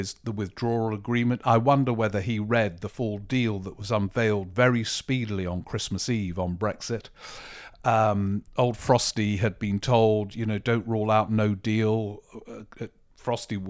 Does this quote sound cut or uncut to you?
uncut